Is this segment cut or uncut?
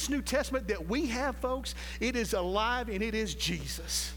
uncut